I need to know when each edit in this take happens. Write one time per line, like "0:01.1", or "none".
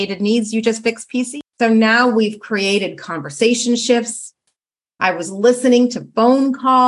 none